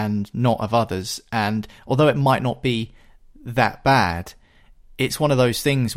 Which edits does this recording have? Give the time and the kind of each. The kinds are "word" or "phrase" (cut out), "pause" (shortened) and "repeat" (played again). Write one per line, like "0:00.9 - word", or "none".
none

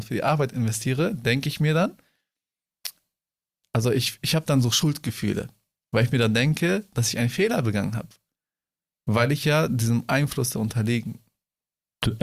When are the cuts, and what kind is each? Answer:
none

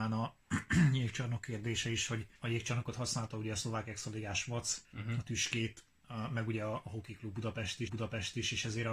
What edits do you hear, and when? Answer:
0:02.4 - pause
0:04.8 - pause
0:07.9 - repeat

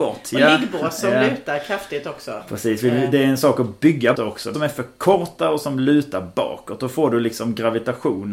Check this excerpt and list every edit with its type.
0:04.1 - word
0:04.5 - phrase

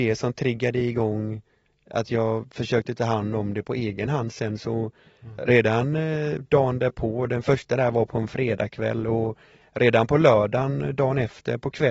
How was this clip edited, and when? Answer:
none

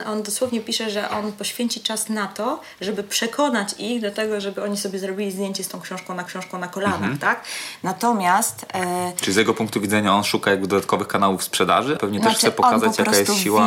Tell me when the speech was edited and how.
0:06.3 - repeat
0:12.0 - word

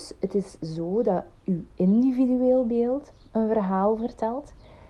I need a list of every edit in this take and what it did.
none

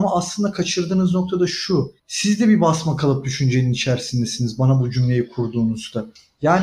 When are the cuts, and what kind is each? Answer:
0:02.0 - pause

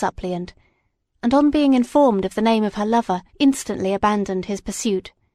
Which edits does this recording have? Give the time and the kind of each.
0:03.3 - pause

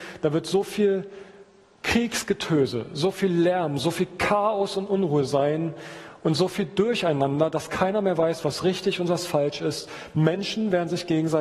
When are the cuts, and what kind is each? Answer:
none

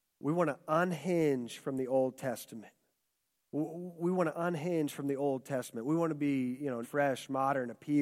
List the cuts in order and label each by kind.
0:03.0 - pause
0:06.8 - word

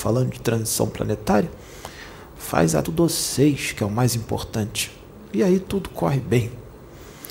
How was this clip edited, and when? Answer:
0:02.8 - phrase

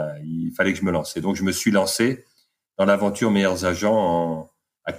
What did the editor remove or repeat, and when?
none

